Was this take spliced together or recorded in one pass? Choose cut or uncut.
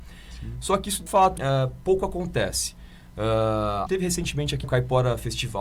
cut